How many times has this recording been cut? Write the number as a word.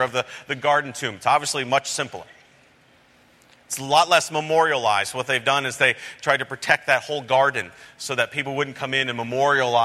zero